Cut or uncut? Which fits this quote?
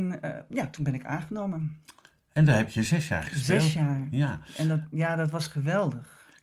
uncut